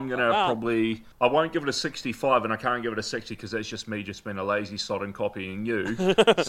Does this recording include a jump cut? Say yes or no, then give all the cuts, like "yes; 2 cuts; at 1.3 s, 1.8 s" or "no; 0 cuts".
yes; 1 cut; at 1.1 s